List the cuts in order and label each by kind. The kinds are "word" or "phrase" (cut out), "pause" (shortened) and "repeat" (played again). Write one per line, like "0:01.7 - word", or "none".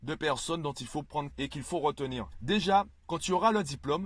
0:01.3 - word